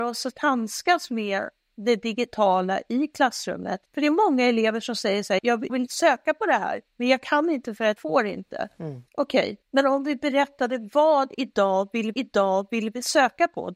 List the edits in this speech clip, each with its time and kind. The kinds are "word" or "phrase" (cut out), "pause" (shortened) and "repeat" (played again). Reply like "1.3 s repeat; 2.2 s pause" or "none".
3.9 s pause; 5.4 s word; 5.7 s word; 6.9 s pause; 8.0 s word; 9.1 s pause; 9.6 s pause; 12.1 s repeat